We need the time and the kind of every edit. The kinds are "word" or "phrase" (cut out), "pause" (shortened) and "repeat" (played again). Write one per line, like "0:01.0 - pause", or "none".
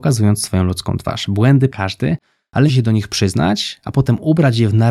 0:01.7 - word
0:02.7 - phrase